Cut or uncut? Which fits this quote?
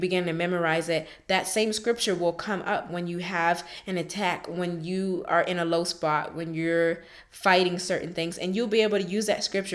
uncut